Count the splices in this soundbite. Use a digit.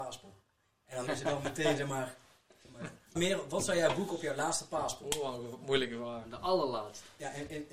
2